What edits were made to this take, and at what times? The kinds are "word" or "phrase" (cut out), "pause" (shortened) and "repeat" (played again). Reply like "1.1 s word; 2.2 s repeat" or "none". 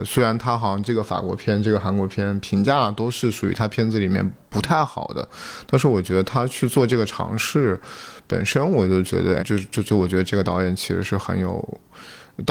9.4 s word